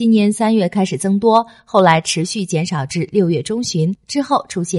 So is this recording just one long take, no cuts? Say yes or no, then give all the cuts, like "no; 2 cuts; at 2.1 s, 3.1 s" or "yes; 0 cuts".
yes; 0 cuts